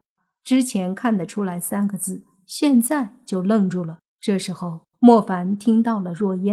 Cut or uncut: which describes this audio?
cut